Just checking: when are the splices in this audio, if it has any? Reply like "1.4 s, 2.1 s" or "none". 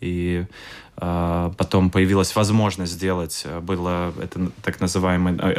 none